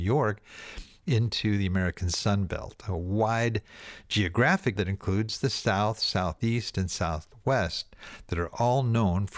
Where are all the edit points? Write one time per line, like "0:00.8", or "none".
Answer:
0:04.8

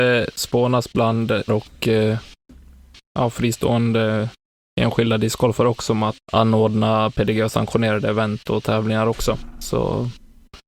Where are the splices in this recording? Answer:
0:01.5
0:06.2

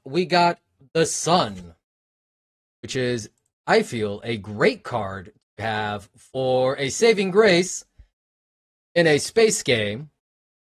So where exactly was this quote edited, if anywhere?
none

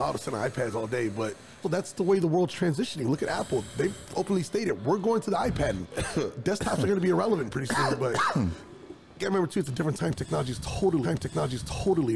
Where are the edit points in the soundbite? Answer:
0:01.6
0:11.0

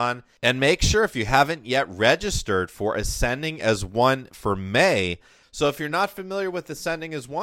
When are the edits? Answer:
none

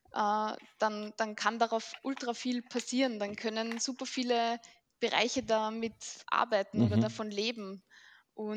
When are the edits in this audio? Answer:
none

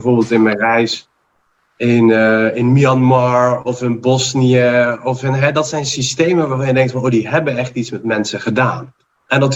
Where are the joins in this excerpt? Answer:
none

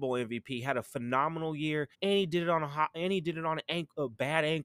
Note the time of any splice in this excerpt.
0:01.9

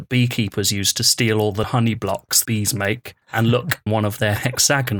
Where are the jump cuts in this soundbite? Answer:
0:01.6
0:02.4
0:03.2
0:03.9

